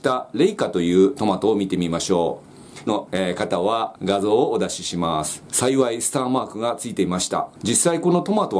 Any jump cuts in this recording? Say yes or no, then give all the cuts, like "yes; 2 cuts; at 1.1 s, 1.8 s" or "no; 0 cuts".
yes; 1 cut; at 2.9 s